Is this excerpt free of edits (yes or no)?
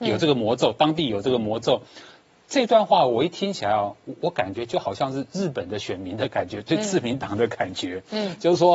yes